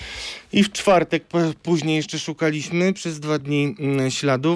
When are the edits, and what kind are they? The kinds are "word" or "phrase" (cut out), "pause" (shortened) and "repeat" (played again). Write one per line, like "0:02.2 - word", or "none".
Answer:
none